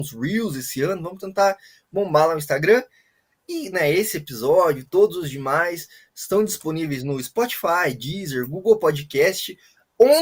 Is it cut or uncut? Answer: uncut